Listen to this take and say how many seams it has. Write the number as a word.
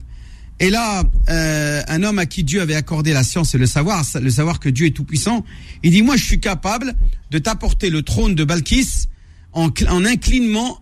zero